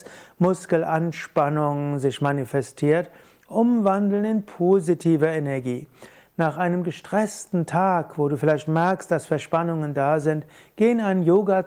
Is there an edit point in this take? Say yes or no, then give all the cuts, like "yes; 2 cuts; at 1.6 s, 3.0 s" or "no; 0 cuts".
no; 0 cuts